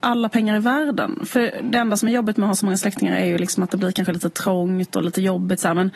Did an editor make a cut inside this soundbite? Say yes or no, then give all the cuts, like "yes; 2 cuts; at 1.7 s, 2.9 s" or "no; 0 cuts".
no; 0 cuts